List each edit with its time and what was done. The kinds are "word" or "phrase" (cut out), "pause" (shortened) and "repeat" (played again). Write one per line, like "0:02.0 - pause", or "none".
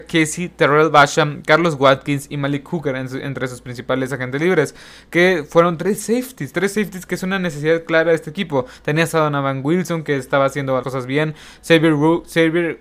0:10.8 - word